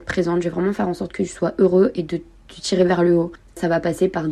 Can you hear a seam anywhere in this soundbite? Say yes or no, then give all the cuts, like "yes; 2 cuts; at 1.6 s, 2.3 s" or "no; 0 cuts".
no; 0 cuts